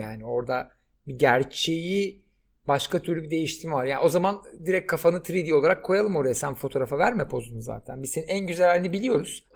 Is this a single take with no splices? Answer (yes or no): yes